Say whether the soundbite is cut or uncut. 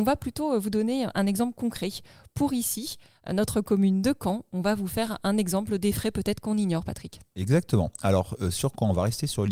uncut